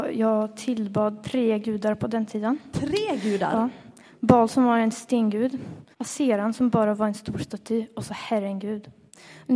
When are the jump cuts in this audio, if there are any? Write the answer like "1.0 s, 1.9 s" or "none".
5.9 s